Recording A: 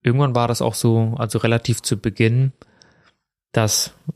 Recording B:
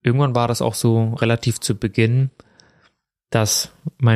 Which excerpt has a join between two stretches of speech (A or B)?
B